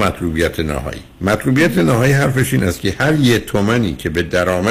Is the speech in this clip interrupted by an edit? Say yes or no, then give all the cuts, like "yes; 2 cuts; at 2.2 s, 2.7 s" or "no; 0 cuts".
yes; 1 cut; at 1.1 s